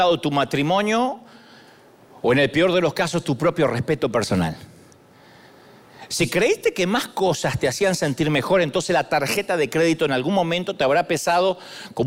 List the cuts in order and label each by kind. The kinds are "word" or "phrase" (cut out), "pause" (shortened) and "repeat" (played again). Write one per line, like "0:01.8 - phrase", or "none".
none